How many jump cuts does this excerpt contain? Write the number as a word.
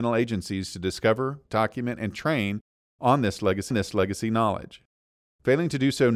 two